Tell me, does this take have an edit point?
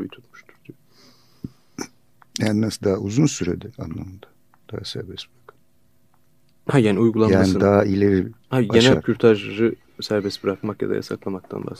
yes; 3 cuts; at 3.7 s, 8.4 s, 8.9 s

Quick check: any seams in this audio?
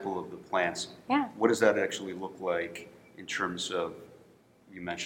no; 0 cuts

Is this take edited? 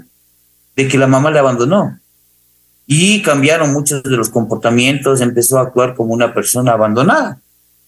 no; 0 cuts

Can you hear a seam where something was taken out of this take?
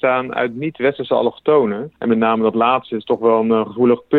yes; 1 cut; at 2.0 s

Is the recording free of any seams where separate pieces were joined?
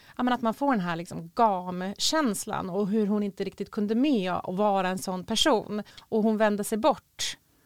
no; 1 cut; at 5.9 s

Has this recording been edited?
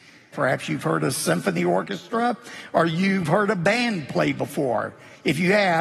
no; 0 cuts

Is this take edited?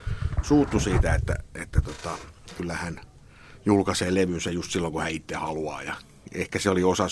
no; 0 cuts

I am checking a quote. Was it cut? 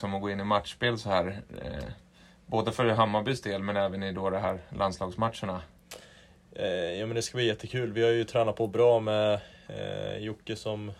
no; 0 cuts

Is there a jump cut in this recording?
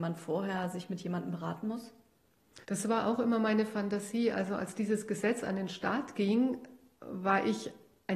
yes; 1 cut; at 2.6 s

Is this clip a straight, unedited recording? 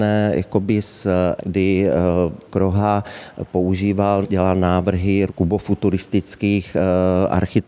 no; 4 cuts; at 1.4 s, 2.5 s, 4.2 s, 5.3 s

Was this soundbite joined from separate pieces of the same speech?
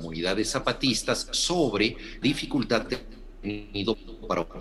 yes; 2 cuts; at 2.2 s, 2.9 s

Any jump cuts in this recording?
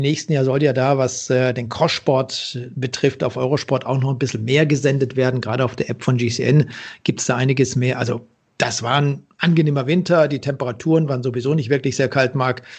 no; 0 cuts

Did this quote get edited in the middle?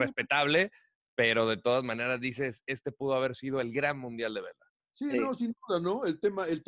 yes; 1 cut; at 4.7 s

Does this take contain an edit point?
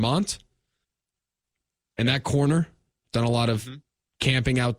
no; 0 cuts

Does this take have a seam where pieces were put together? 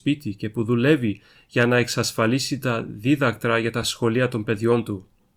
no; 0 cuts

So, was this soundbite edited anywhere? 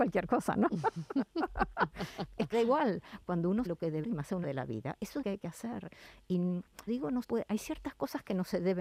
yes; 7 cuts; at 2.5 s, 3.6 s, 4.0 s, 4.4 s, 5.2 s, 6.9 s, 7.2 s

